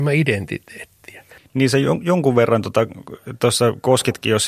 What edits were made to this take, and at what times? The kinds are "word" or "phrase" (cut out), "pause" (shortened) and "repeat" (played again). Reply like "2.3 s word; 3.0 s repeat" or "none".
none